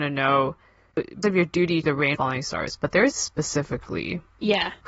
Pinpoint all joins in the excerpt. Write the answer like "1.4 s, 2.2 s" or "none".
1.2 s, 1.8 s, 2.1 s, 3.1 s